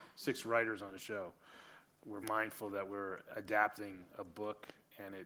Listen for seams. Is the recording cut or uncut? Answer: cut